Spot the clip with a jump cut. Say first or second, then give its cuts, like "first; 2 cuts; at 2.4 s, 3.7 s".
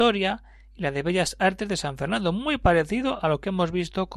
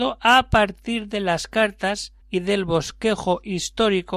second; 1 cut; at 2.2 s